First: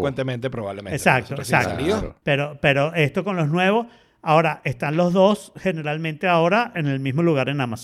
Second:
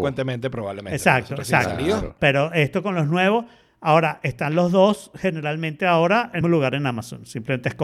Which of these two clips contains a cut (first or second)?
second